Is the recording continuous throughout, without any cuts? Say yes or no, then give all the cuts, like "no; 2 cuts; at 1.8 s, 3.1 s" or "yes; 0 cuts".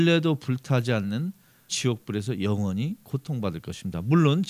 no; 1 cut; at 1.7 s